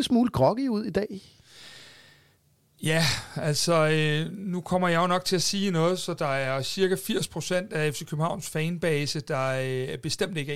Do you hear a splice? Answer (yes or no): no